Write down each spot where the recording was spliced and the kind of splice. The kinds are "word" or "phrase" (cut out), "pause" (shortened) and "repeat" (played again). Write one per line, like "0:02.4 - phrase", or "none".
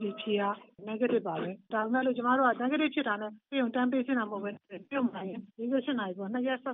0:05.5 - pause